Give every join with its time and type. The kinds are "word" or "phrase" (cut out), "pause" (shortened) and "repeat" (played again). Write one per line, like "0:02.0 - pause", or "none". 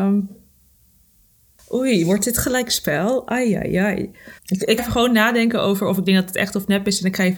0:04.4 - pause
0:04.8 - word